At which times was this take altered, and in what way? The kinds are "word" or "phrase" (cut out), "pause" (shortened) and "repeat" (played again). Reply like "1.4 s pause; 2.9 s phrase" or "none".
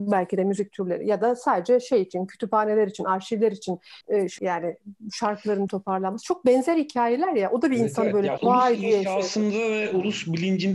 4.0 s pause; 4.4 s word; 5.7 s word; 8.4 s word